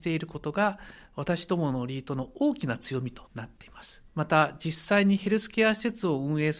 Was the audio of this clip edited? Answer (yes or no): yes